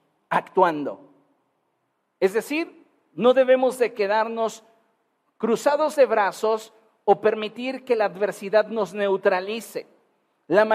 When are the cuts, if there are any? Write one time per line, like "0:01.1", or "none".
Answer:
none

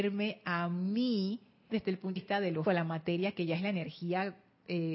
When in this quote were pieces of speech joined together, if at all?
0:01.7
0:02.2
0:02.7

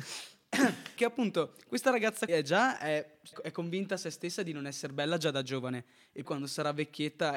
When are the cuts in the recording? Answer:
0:01.0
0:02.3
0:03.3
0:06.2

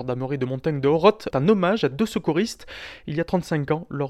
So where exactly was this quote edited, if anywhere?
0:01.3

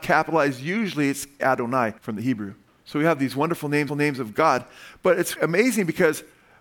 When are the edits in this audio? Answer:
0:01.4
0:02.0
0:02.7
0:03.9
0:05.4

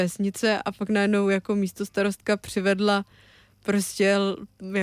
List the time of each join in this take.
none

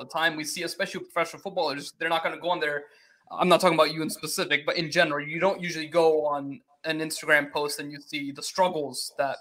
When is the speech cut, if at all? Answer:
none

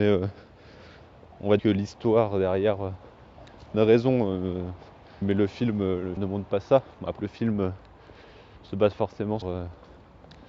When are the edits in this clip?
0:01.6
0:03.7
0:05.2
0:06.2
0:07.2
0:09.4

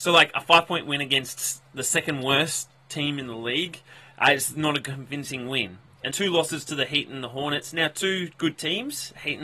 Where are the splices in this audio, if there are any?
0:04.0
0:06.1

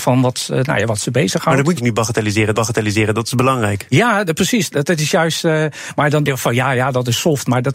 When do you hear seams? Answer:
0:01.8
0:02.5
0:06.3

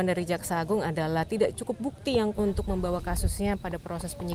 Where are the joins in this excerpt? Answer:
0:02.3

